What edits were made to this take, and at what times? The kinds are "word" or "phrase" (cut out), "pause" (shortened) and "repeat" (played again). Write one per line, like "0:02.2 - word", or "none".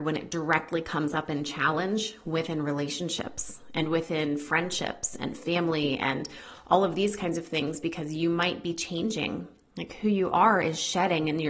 none